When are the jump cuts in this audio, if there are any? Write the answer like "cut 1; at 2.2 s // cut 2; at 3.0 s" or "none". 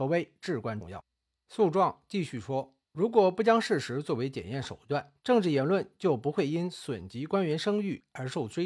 cut 1; at 2.8 s // cut 2; at 5.2 s